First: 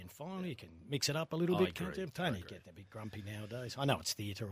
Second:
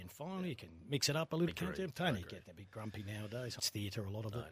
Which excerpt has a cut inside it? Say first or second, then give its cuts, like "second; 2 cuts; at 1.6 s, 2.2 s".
second; 2 cuts; at 1.5 s, 3.6 s